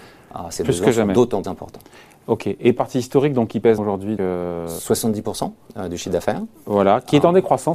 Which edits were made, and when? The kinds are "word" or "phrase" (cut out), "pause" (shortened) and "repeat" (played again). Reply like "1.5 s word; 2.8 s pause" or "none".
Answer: 1.4 s word; 2.8 s word; 3.8 s word; 4.2 s word